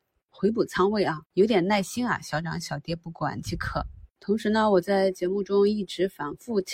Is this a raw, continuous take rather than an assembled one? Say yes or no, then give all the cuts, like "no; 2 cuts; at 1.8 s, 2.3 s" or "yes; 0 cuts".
no; 1 cut; at 1.3 s